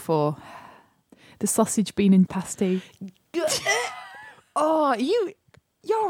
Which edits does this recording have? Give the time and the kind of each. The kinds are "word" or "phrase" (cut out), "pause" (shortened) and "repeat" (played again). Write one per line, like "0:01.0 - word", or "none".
0:02.3 - word